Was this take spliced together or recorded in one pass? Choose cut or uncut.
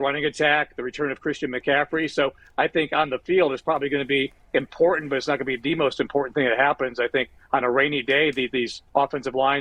uncut